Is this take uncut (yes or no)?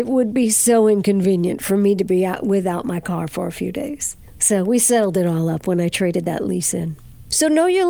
yes